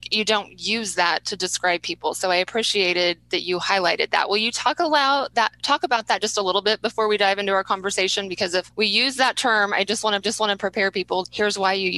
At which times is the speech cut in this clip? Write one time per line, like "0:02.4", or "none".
0:10.2